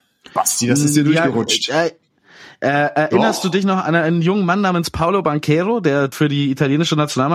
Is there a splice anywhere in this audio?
yes; 1 cut; at 6.1 s

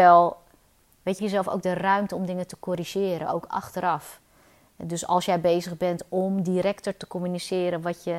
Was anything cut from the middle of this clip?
yes; 1 cut; at 1.2 s

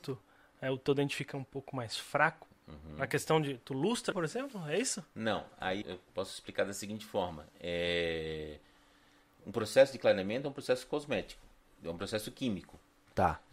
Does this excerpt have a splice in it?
yes; 3 cuts; at 2.5 s, 4.1 s, 5.8 s

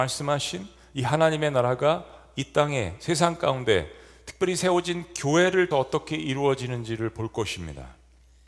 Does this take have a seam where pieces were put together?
yes; 1 cut; at 5.7 s

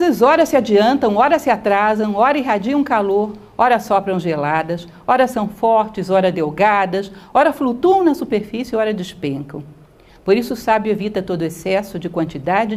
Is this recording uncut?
yes; 0 cuts

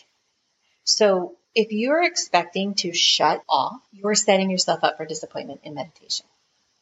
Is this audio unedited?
no; 3 cuts; at 1.5 s, 3.4 s, 3.9 s

